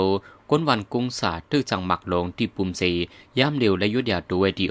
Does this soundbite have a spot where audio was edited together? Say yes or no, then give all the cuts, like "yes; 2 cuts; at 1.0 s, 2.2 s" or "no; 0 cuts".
no; 0 cuts